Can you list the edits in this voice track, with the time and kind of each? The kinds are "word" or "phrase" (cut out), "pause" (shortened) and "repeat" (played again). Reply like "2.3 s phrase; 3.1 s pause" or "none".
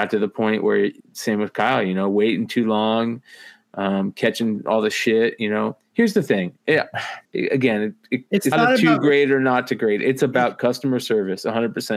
1.0 s pause; 7.2 s pause; 8.5 s word